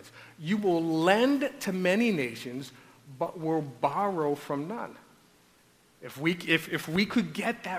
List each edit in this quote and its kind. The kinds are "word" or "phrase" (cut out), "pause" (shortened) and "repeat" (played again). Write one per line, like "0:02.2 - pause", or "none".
0:06.7 - word